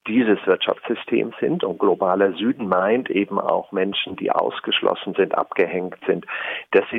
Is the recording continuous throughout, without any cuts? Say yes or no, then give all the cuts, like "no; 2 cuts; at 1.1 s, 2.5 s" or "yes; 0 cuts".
yes; 0 cuts